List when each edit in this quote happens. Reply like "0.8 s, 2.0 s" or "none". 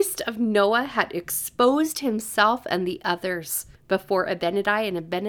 3.8 s